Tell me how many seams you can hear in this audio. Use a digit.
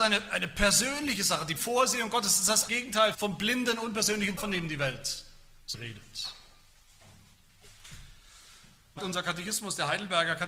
6